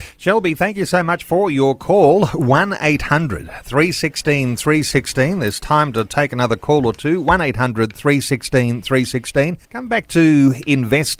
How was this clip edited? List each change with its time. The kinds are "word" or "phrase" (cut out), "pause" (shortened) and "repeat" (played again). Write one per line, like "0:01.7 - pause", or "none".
0:09.6 - pause